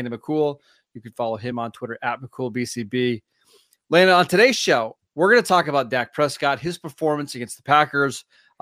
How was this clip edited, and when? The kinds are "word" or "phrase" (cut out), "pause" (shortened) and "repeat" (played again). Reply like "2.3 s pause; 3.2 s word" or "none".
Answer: none